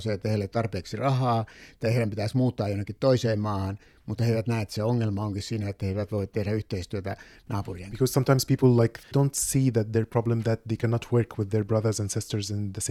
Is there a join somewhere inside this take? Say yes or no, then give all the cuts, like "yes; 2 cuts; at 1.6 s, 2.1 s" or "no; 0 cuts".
no; 0 cuts